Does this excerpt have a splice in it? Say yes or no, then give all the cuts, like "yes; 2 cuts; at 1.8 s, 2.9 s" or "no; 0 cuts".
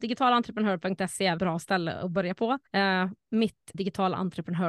yes; 3 cuts; at 1.4 s, 2.7 s, 3.7 s